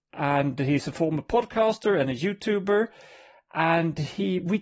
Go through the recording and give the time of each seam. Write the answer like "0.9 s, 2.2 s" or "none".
none